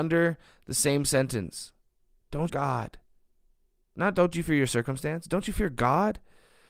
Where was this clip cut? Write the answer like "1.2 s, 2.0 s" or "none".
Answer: 2.5 s

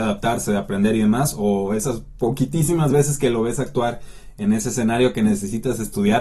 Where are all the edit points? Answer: none

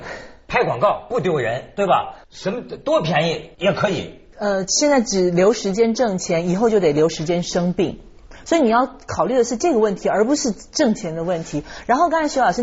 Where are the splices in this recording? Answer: 2.2 s, 3.5 s

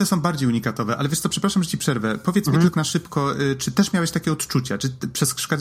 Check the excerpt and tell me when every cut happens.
2.7 s

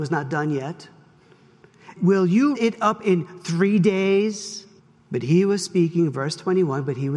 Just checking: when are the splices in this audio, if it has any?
2.0 s, 2.5 s, 4.8 s

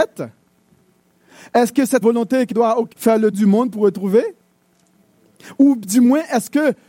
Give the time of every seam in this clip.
2.0 s, 2.5 s, 2.9 s, 3.3 s

